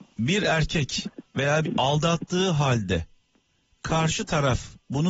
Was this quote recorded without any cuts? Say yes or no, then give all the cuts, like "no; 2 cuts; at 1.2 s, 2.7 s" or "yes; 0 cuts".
no; 1 cut; at 1.6 s